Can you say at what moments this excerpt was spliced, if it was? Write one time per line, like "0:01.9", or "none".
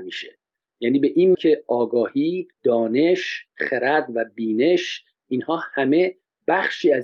0:01.3
0:02.5